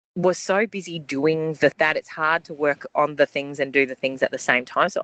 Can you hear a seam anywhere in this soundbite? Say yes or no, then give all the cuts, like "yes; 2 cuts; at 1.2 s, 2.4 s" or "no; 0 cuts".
yes; 1 cut; at 1.7 s